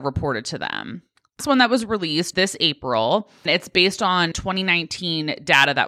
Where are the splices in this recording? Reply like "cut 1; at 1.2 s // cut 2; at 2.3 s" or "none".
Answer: cut 1; at 1.4 s // cut 2; at 2.3 s // cut 3; at 3.5 s // cut 4; at 4.3 s